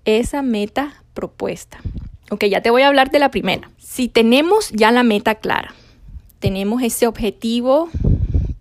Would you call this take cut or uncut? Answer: cut